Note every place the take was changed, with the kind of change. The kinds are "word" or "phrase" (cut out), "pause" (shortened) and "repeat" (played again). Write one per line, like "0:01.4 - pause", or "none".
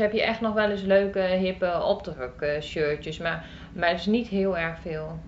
none